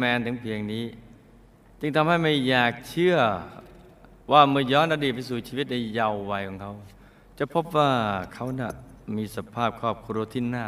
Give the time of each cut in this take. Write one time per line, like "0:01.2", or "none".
0:04.2